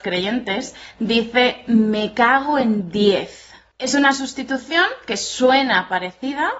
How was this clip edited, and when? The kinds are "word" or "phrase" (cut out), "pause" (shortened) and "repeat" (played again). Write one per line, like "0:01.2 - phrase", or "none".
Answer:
none